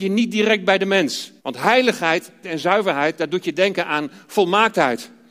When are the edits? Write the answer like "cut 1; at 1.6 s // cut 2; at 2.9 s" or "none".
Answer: cut 1; at 1.4 s // cut 2; at 2.4 s